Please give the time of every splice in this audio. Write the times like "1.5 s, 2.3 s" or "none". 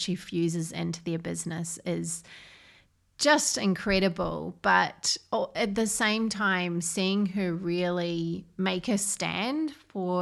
none